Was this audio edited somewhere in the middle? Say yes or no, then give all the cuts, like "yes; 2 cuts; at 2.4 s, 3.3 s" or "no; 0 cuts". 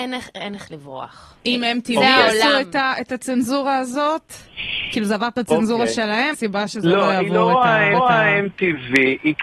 yes; 3 cuts; at 1.4 s, 6.3 s, 7.9 s